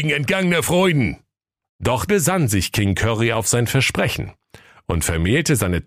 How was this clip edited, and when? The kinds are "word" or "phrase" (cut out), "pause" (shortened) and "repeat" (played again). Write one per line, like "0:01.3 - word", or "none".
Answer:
0:02.1 - word